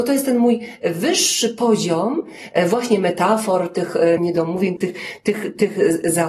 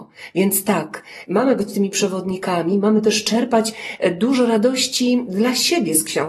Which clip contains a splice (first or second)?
first